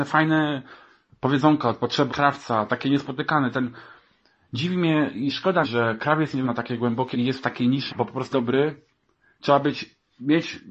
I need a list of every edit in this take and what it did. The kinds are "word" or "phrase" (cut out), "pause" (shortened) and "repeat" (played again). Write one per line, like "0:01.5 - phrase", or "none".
0:02.1 - word
0:05.6 - word
0:06.4 - word
0:07.1 - word
0:07.9 - word
0:08.3 - phrase